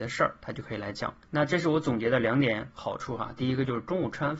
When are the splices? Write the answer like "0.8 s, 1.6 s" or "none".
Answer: 1.2 s